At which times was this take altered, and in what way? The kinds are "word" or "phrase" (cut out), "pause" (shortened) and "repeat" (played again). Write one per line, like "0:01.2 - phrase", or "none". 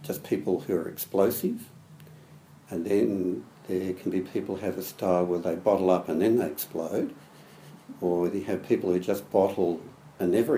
none